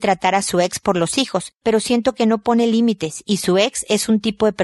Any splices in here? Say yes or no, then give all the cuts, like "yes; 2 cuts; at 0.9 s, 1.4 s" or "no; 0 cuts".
no; 0 cuts